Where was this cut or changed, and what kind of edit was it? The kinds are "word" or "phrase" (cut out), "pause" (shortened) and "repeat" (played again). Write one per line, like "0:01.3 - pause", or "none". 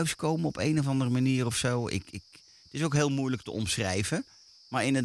none